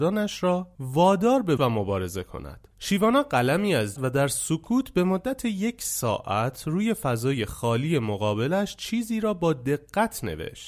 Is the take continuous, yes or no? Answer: no